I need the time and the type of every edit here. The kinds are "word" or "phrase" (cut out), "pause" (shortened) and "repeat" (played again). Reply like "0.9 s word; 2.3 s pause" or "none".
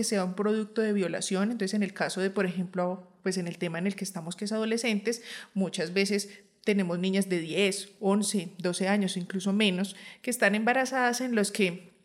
none